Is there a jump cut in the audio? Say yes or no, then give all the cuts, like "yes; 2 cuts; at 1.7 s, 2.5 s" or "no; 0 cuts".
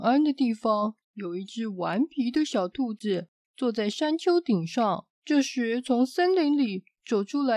yes; 2 cuts; at 1.0 s, 5.1 s